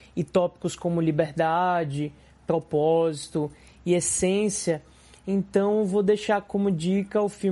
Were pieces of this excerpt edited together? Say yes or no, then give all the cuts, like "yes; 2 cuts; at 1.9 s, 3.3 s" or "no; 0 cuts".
no; 0 cuts